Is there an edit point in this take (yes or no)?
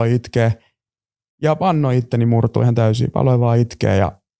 no